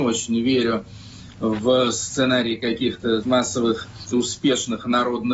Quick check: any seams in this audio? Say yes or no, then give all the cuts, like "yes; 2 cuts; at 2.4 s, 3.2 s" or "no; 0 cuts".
yes; 2 cuts; at 3.2 s, 4.1 s